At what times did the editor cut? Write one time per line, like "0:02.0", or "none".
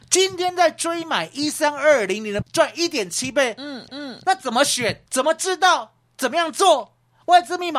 0:02.4
0:03.9
0:05.1